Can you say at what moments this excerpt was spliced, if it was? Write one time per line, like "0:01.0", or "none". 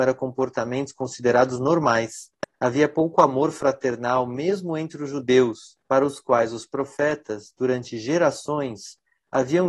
0:02.5
0:05.8